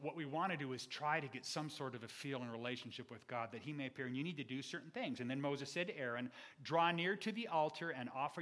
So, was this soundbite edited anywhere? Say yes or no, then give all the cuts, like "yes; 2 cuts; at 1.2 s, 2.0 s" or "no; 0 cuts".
no; 0 cuts